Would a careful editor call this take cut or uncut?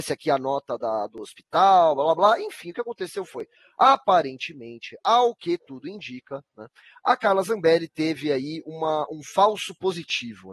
uncut